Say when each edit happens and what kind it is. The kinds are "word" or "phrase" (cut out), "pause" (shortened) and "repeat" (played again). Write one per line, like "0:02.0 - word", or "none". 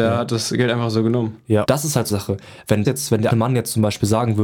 0:01.6 - word
0:02.1 - word
0:02.8 - word
0:03.3 - word